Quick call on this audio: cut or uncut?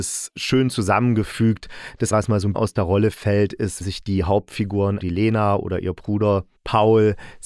cut